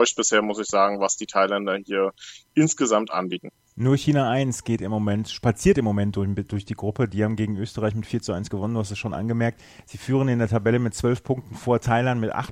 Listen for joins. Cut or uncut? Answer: uncut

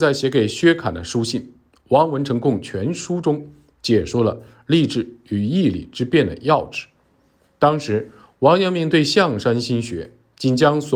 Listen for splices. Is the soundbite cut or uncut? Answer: uncut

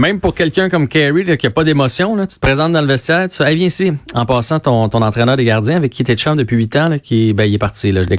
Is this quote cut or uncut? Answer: uncut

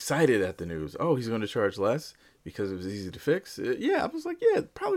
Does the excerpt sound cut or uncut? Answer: uncut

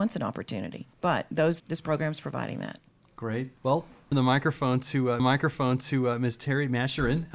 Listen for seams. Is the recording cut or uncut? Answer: cut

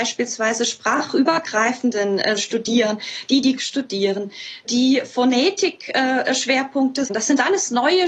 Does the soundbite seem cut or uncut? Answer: cut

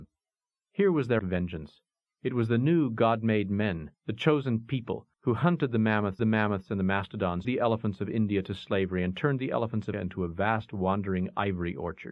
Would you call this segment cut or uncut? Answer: cut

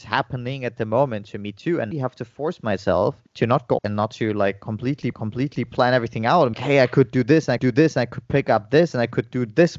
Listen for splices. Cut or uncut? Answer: cut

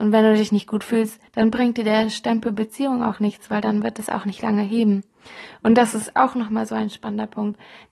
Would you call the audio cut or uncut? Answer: cut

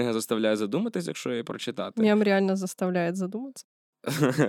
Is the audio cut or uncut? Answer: uncut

